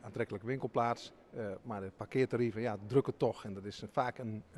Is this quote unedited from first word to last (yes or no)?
yes